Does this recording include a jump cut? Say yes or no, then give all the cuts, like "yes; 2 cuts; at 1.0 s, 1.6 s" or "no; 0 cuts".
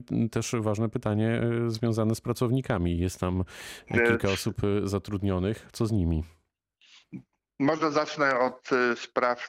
no; 0 cuts